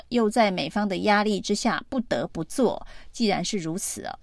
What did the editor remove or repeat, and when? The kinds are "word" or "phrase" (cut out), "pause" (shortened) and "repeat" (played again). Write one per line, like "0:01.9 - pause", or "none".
none